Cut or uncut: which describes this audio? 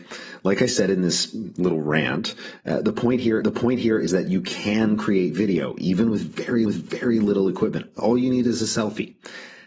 cut